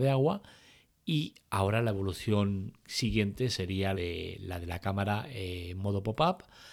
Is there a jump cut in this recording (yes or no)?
yes